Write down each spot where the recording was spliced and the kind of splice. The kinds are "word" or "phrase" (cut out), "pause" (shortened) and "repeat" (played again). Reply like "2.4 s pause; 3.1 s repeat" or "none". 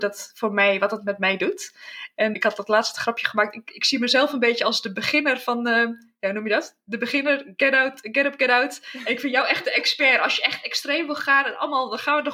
2.3 s word

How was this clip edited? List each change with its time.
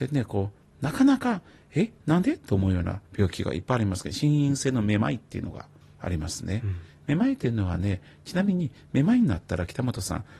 3.1 s pause; 5.8 s pause

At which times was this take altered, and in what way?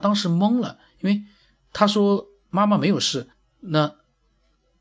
3.3 s pause

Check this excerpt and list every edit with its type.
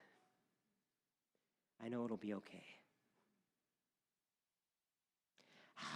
none

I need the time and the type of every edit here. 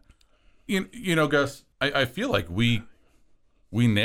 1.7 s pause

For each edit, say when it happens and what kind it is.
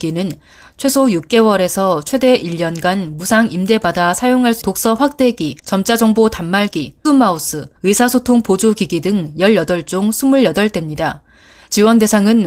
4.6 s phrase; 5.6 s pause; 7.0 s word; 7.8 s pause

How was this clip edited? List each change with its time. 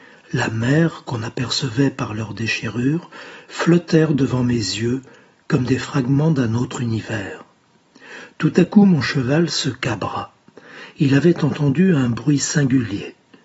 none

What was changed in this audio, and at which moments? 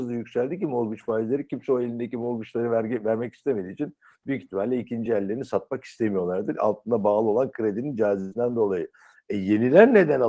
none

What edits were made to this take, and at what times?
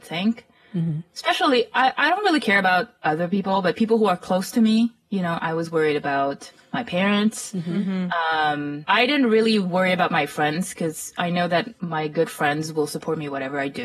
none

